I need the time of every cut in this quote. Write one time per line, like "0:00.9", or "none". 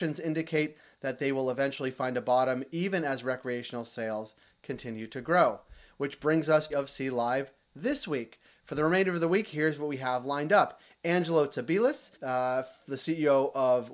0:06.7
0:12.1